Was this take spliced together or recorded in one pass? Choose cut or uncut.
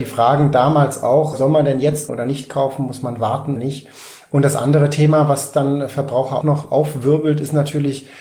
cut